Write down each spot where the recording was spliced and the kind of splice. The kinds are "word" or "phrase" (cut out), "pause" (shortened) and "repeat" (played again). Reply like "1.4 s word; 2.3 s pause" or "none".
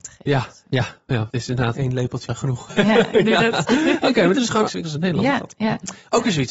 1.3 s word; 1.7 s word; 2.3 s word; 2.7 s word; 4.3 s word; 4.7 s word